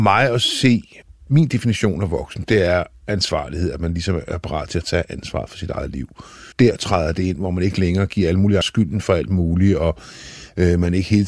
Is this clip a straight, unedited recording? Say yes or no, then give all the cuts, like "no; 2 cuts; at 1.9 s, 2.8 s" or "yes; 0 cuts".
no; 3 cuts; at 1.0 s, 6.5 s, 8.6 s